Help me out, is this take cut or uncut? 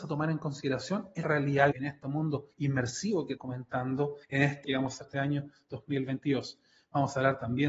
cut